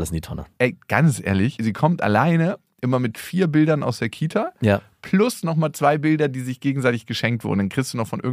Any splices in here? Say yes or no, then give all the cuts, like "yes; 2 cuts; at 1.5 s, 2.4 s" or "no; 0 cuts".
no; 0 cuts